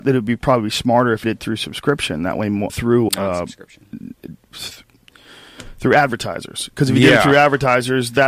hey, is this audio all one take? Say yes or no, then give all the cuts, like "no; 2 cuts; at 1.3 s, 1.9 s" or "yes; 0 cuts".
no; 3 cuts; at 1.2 s, 2.7 s, 3.1 s